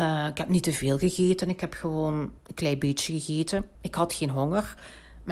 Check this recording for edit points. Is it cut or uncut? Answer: cut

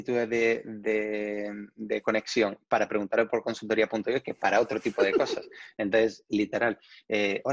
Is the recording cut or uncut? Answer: uncut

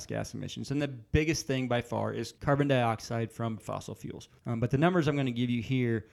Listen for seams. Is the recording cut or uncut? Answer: cut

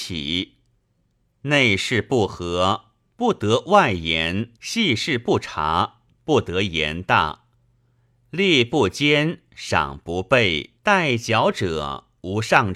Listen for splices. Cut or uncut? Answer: cut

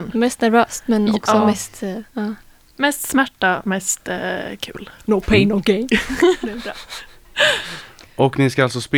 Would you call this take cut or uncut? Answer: uncut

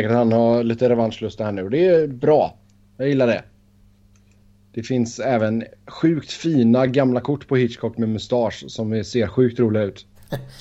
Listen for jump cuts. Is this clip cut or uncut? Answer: uncut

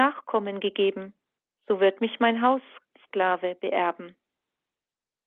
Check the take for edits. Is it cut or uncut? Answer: cut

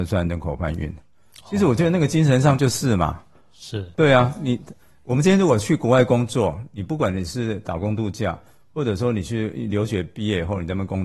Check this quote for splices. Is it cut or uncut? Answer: uncut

